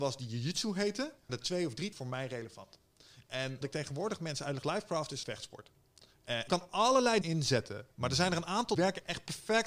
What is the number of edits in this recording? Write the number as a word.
seven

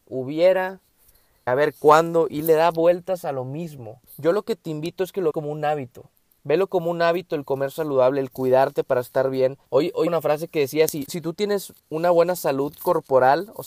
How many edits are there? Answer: eight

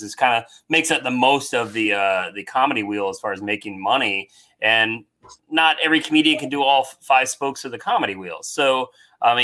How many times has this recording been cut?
zero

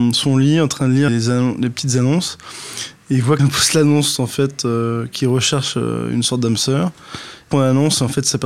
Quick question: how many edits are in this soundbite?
three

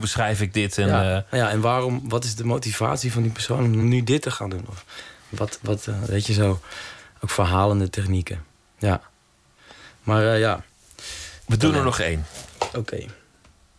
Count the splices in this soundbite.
zero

